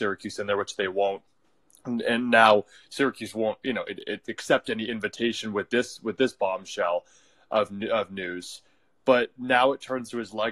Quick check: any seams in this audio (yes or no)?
no